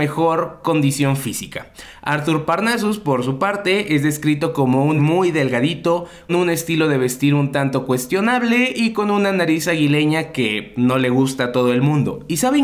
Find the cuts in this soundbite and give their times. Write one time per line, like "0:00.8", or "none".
0:05.0
0:06.3